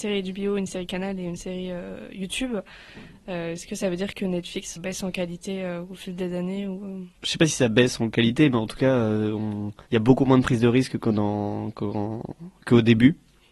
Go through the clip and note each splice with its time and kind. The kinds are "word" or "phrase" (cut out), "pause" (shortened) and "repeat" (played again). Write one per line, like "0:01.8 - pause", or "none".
0:04.8 - word
0:07.2 - pause
0:09.9 - pause